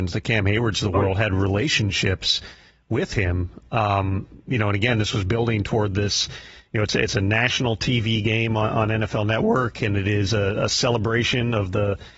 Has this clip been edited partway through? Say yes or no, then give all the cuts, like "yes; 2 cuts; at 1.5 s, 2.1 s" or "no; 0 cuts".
no; 0 cuts